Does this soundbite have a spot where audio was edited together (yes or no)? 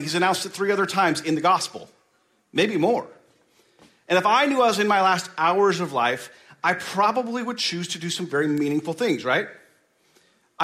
no